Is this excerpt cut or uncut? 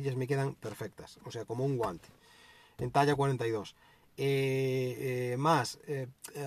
uncut